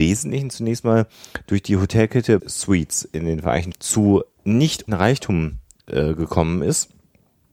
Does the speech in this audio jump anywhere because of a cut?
yes; 3 cuts; at 2.4 s, 3.7 s, 4.9 s

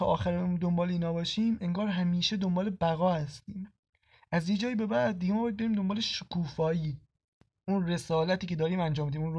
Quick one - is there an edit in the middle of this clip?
no; 0 cuts

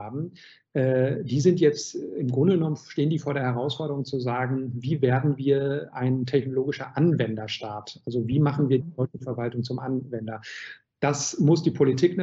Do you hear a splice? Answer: no; 0 cuts

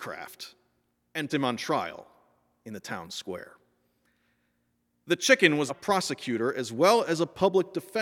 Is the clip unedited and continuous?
no; 2 cuts; at 1.3 s, 5.7 s

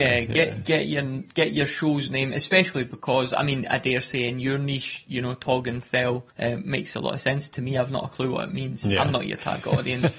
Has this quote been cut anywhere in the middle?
yes; 1 cut; at 6.3 s

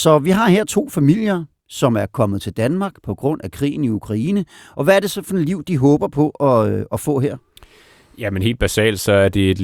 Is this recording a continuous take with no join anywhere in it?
yes; 0 cuts

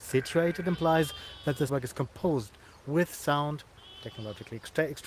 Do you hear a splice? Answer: yes; 1 cut; at 1.7 s

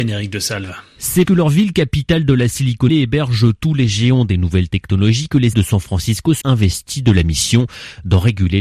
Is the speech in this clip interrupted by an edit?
yes; 4 cuts; at 1.3 s, 2.9 s, 5.5 s, 6.4 s

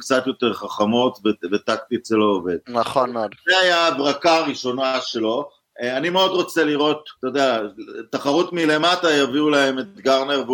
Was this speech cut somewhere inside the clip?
yes; 1 cut; at 7.2 s

